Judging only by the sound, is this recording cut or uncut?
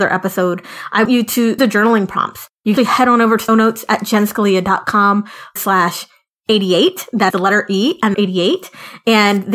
cut